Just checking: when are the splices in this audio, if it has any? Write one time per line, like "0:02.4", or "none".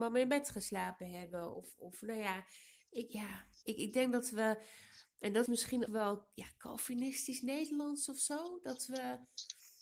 0:03.6
0:05.5
0:05.9

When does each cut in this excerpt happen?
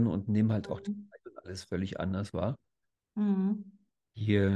none

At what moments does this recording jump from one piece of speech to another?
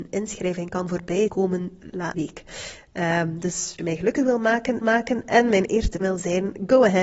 0:01.3
0:02.1
0:03.8
0:04.8
0:06.0

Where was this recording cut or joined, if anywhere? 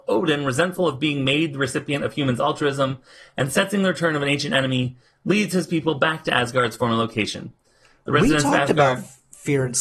none

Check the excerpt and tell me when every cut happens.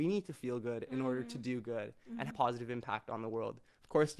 0:02.3

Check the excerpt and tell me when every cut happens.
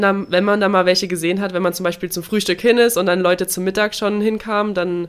none

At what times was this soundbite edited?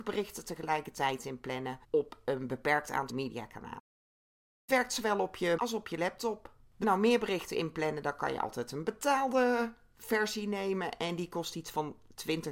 0:01.8
0:03.1
0:04.7
0:05.6
0:06.8

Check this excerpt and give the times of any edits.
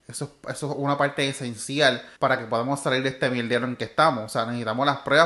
0:02.2

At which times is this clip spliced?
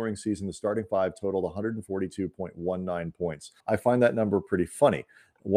0:03.6

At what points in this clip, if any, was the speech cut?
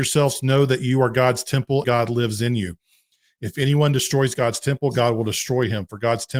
0:01.8

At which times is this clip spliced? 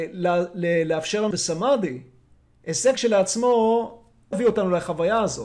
0:01.3
0:03.0
0:04.3

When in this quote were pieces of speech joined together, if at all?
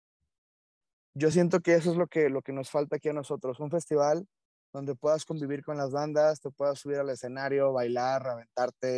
none

